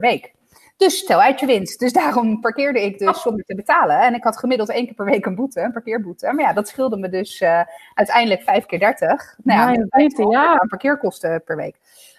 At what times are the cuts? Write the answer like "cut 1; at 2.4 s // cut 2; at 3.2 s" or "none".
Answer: cut 1; at 10.6 s